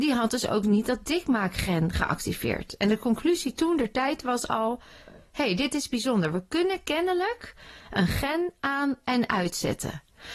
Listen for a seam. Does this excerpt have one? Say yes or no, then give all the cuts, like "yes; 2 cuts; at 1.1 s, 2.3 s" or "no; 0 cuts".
no; 0 cuts